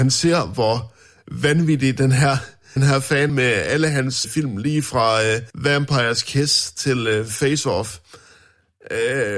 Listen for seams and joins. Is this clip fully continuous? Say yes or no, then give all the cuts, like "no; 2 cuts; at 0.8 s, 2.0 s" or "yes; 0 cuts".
no; 4 cuts; at 2.8 s, 3.3 s, 4.2 s, 5.5 s